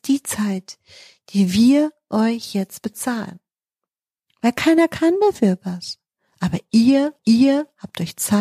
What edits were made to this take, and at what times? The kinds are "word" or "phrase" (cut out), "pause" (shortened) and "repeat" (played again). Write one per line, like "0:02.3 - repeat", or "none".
0:07.2 - repeat